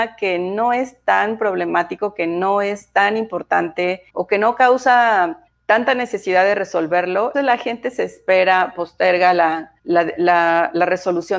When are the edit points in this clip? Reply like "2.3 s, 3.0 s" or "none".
4.1 s, 5.5 s, 7.3 s, 9.8 s

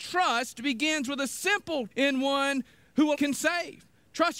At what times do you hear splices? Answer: 1.9 s, 3.1 s

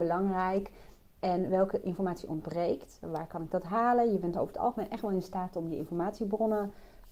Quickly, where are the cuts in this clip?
none

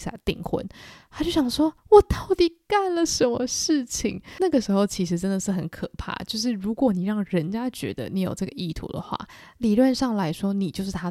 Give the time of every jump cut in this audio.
1.8 s

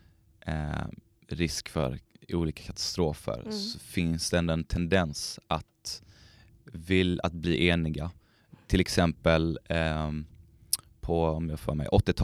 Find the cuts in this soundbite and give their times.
none

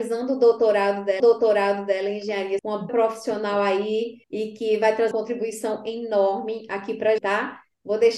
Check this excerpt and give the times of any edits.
1.2 s, 2.6 s, 2.9 s, 4.2 s, 5.1 s, 7.2 s

